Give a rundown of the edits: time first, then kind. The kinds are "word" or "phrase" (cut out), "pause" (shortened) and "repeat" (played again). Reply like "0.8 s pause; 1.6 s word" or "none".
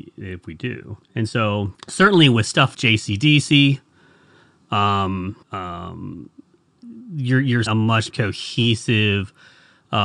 1.0 s pause; 1.7 s pause; 2.7 s word; 5.4 s pause; 7.7 s word; 8.1 s word